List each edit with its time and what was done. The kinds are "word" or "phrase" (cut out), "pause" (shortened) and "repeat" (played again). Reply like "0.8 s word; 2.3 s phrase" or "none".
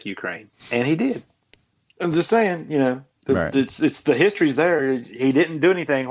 none